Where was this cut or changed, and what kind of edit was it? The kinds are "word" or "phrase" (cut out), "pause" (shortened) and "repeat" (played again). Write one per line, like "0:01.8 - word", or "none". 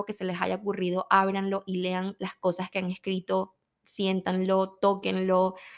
none